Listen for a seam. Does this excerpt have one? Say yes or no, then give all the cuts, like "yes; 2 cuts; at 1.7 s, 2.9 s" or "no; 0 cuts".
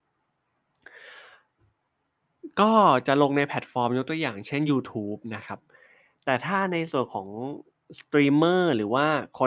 no; 0 cuts